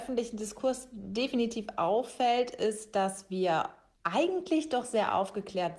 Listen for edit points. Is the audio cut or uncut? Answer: uncut